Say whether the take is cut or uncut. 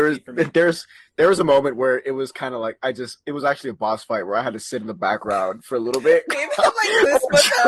uncut